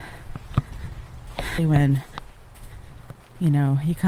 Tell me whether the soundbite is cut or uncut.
cut